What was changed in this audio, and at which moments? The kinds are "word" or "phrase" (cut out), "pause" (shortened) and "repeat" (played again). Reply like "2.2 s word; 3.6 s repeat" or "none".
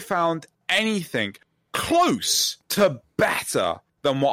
2.6 s pause

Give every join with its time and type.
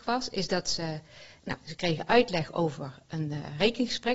none

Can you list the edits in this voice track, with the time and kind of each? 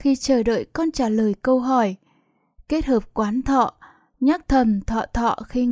none

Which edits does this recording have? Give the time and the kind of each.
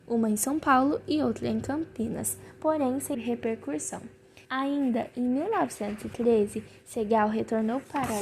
3.1 s word; 4.4 s pause

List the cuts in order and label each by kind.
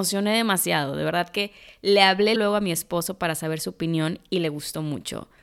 2.4 s word

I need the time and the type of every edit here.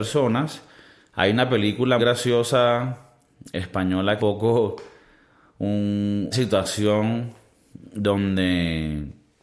2.0 s word; 4.2 s phrase; 6.3 s word

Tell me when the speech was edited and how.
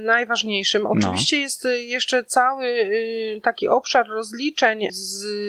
none

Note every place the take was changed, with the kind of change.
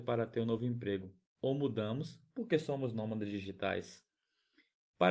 none

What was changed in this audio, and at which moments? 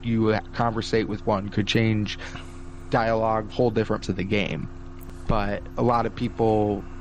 3.5 s word; 4.0 s word; 5.3 s word

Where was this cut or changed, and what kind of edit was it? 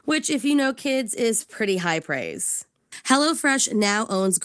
none

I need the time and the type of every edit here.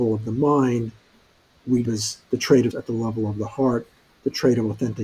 1.8 s word; 2.7 s word

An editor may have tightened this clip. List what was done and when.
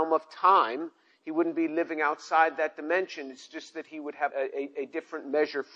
4.3 s word

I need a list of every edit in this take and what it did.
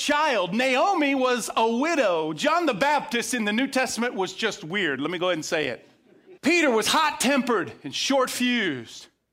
6.4 s pause

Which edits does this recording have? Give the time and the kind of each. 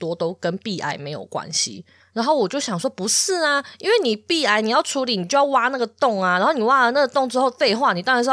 2.0 s pause

